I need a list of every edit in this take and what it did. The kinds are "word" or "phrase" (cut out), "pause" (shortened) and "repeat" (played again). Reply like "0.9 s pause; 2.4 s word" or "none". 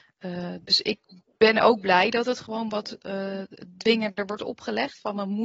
1.2 s pause